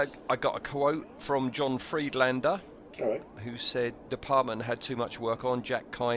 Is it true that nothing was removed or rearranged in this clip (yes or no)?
no